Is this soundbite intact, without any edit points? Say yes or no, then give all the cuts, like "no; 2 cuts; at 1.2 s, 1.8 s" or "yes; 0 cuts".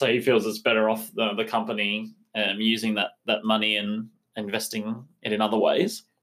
yes; 0 cuts